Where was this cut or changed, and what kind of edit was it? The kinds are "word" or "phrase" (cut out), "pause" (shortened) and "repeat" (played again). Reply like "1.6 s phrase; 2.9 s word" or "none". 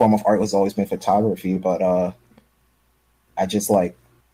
none